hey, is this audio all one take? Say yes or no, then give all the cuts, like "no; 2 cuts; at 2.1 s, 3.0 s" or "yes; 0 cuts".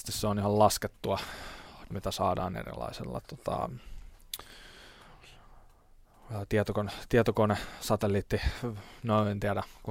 no; 1 cut; at 1.9 s